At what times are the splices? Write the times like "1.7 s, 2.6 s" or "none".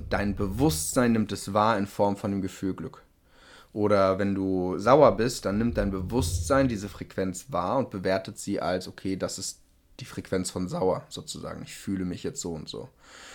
none